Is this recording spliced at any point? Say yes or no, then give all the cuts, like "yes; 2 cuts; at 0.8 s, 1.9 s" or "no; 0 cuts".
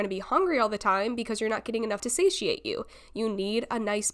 yes; 1 cut; at 2.0 s